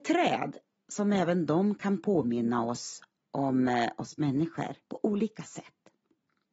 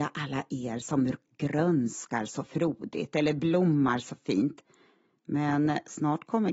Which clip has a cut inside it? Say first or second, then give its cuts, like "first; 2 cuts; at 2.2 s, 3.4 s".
first; 2 cuts; at 3.2 s, 4.8 s